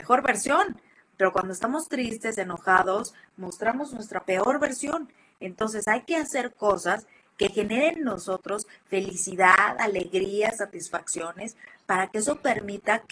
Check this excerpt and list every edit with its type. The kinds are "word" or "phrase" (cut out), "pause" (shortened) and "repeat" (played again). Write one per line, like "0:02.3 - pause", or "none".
none